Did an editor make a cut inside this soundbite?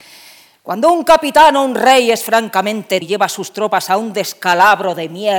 yes; 1 cut; at 3.0 s

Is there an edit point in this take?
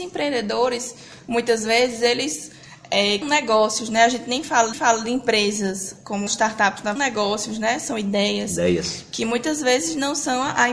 yes; 4 cuts; at 3.2 s, 4.7 s, 6.3 s, 7.0 s

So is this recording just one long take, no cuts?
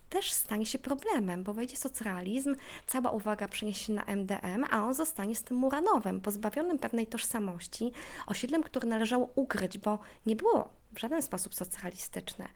yes; 0 cuts

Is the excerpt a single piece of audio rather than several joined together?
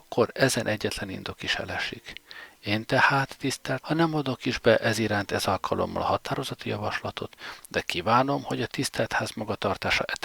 no; 1 cut; at 3.8 s

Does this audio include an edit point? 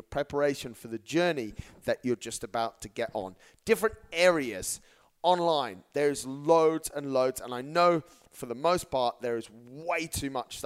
no; 0 cuts

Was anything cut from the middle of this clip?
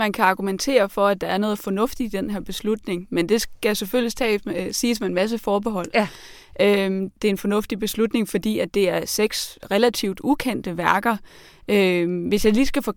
no; 0 cuts

